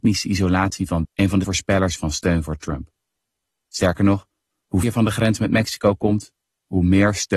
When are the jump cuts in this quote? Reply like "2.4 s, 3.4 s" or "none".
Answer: 1.0 s, 1.4 s, 2.0 s, 4.8 s